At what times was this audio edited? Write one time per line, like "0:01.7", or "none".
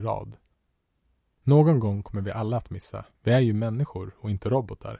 0:03.1